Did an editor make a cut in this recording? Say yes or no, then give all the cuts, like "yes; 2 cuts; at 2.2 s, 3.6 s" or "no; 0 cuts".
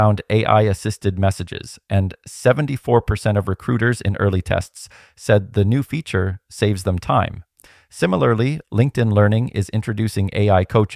no; 0 cuts